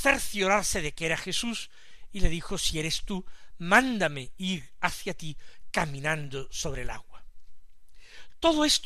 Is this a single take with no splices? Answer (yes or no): yes